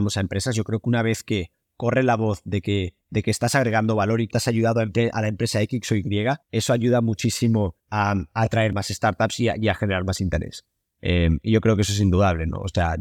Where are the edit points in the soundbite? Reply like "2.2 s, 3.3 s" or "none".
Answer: 3.0 s, 4.3 s, 6.4 s, 7.8 s